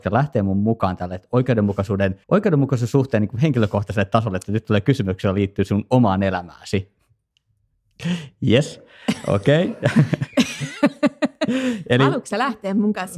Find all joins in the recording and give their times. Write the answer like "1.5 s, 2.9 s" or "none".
2.2 s